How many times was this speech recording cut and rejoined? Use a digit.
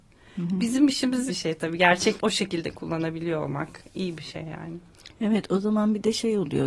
2